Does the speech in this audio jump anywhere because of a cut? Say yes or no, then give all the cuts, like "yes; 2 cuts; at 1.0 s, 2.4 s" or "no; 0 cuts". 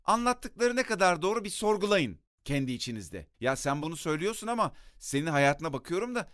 yes; 2 cuts; at 3.3 s, 3.8 s